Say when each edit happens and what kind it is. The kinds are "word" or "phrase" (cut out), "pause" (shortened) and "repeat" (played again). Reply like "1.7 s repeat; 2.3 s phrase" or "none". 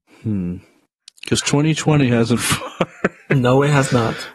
2.4 s phrase